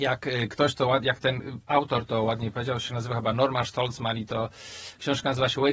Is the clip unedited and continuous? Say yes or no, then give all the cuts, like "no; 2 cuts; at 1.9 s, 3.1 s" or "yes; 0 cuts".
yes; 0 cuts